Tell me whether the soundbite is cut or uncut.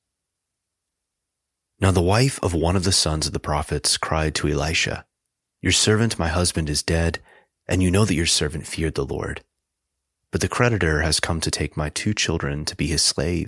uncut